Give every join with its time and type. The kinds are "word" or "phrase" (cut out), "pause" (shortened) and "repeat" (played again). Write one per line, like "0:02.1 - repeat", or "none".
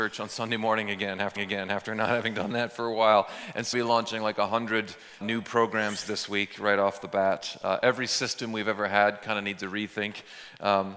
0:01.4 - repeat
0:03.7 - phrase
0:05.2 - word